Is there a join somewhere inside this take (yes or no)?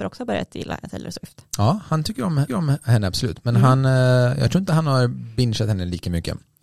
yes